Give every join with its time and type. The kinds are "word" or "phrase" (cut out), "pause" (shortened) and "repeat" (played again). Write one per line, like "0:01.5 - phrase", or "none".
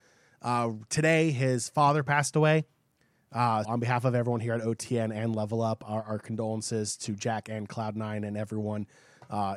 0:03.6 - word